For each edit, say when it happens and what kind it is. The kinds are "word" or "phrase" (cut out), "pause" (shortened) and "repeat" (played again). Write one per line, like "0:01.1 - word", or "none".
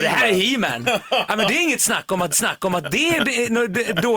0:02.3 - repeat